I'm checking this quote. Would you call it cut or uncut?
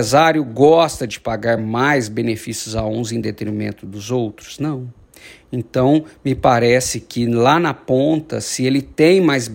uncut